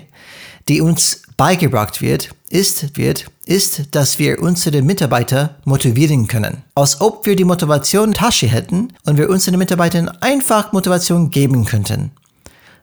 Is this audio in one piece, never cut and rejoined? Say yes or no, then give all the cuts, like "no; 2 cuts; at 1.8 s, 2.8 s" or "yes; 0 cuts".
no; 4 cuts; at 2.9 s, 6.7 s, 8.1 s, 9.0 s